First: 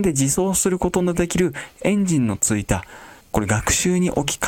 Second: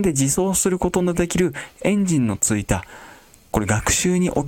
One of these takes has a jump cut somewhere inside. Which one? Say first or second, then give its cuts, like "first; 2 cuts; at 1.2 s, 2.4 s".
first; 1 cut; at 3.2 s